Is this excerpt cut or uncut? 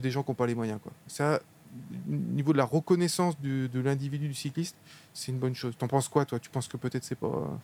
uncut